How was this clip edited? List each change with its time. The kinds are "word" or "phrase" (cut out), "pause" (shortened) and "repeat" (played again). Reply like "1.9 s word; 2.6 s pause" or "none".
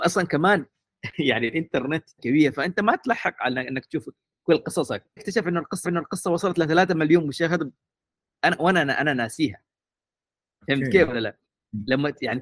2.2 s word; 5.2 s word; 5.8 s repeat